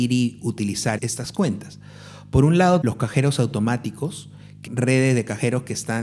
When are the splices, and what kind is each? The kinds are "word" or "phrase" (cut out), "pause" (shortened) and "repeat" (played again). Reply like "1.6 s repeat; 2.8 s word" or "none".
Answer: 1.0 s word; 2.8 s word; 4.7 s word